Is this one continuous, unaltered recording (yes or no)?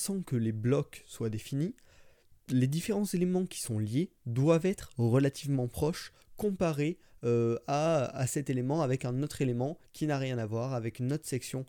yes